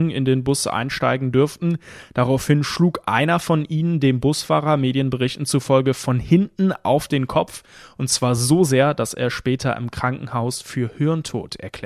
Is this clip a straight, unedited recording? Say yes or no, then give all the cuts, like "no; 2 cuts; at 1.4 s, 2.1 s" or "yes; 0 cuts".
yes; 0 cuts